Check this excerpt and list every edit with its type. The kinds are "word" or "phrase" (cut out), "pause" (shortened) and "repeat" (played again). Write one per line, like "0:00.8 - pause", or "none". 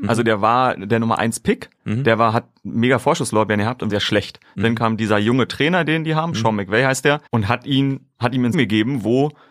0:03.9 - phrase
0:07.3 - pause
0:08.5 - word